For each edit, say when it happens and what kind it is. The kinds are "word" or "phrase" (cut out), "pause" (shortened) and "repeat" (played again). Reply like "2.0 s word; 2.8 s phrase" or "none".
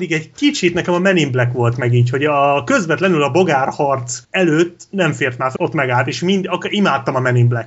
4.2 s pause; 5.6 s word